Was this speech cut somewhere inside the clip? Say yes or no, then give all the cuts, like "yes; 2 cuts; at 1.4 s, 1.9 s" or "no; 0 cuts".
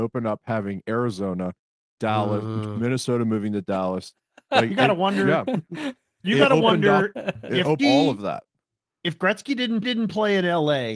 yes; 2 cuts; at 7.8 s, 9.8 s